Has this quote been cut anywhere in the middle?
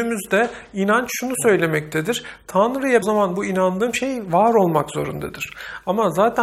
yes; 1 cut; at 3.0 s

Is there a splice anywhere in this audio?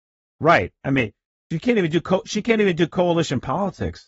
no; 0 cuts

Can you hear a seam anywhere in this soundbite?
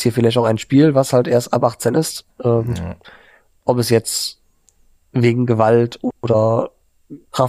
no; 0 cuts

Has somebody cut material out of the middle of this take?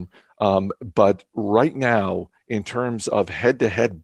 no; 0 cuts

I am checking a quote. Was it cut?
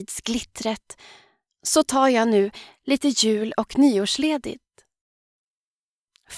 no; 0 cuts

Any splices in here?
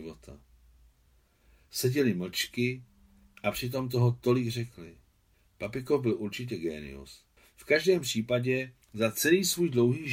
yes; 3 cuts; at 5.3 s, 7.4 s, 8.8 s

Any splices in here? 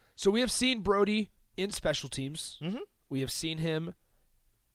no; 0 cuts

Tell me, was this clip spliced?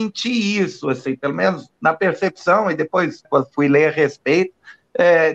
yes; 1 cut; at 3.2 s

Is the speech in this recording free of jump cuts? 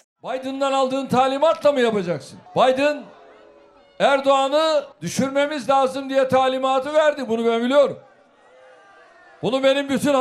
no; 2 cuts; at 2.5 s, 4.9 s

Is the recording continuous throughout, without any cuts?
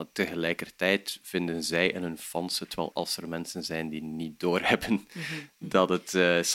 no; 1 cut; at 2.9 s

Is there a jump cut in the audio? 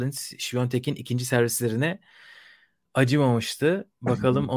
no; 0 cuts

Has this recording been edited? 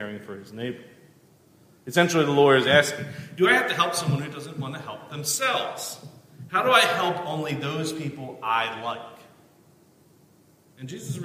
no; 0 cuts

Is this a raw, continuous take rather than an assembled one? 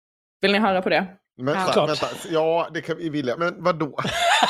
no; 2 cuts; at 1.7 s, 3.4 s

